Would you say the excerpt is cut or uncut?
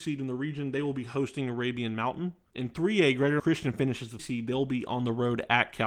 cut